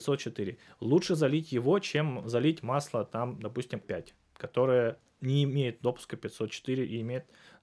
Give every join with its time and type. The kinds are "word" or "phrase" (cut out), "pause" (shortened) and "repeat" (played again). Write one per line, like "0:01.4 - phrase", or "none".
0:03.8 - phrase